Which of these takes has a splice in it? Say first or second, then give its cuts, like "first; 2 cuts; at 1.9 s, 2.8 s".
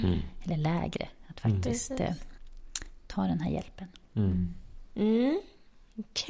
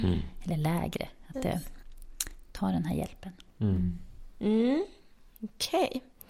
second; 1 cut; at 1.3 s